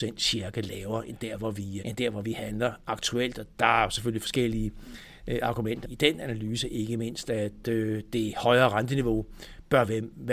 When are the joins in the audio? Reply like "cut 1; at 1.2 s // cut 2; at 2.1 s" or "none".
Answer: cut 1; at 1.8 s // cut 2; at 5.8 s